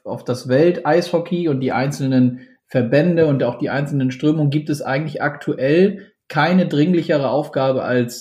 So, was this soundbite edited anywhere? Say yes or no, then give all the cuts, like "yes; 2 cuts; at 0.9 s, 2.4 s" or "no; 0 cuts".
no; 0 cuts